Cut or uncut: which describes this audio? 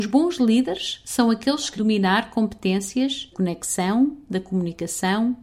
cut